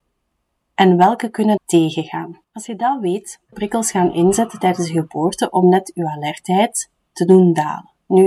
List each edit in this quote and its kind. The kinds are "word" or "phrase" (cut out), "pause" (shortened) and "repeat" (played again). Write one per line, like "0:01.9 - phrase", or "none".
0:01.6 - phrase
0:02.4 - pause
0:03.5 - phrase